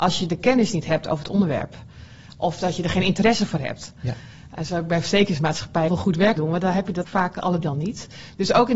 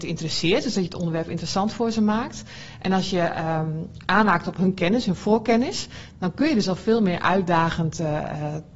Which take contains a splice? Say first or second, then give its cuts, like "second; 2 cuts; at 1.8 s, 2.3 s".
first; 4 cuts; at 5.9 s, 6.4 s, 7.0 s, 7.6 s